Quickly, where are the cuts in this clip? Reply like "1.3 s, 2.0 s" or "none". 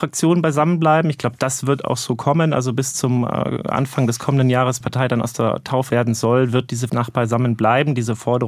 4.8 s, 5.9 s, 6.9 s

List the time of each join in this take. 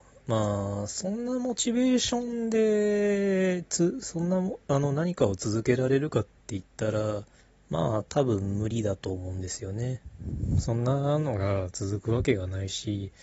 7.4 s

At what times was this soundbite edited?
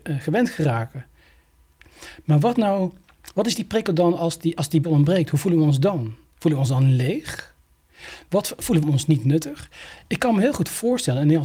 4.8 s, 8.8 s

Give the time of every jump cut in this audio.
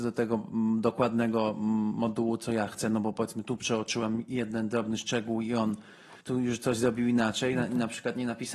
6.2 s

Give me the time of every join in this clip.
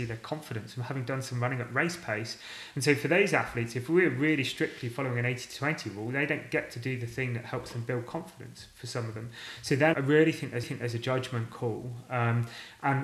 9.9 s, 10.6 s

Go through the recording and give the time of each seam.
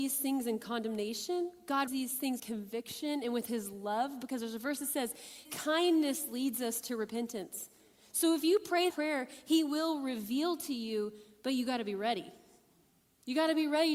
1.9 s, 2.4 s, 5.4 s, 8.9 s

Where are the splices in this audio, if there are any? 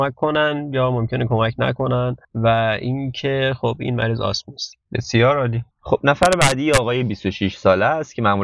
2.2 s, 5.7 s

